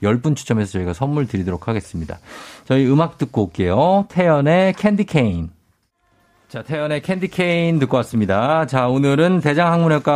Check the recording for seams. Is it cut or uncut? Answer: uncut